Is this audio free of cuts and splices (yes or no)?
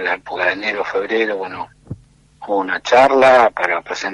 yes